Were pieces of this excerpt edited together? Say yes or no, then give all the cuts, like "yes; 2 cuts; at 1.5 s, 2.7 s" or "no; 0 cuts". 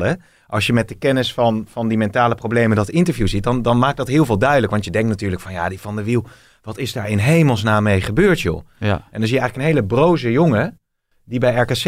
no; 0 cuts